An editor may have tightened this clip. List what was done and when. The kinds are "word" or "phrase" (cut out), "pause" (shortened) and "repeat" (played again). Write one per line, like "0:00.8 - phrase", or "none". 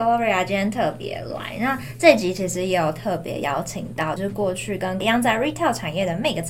0:04.2 - word
0:05.0 - word